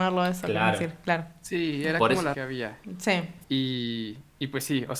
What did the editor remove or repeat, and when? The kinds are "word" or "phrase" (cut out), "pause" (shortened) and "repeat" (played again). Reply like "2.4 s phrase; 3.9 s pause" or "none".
2.3 s phrase; 3.4 s pause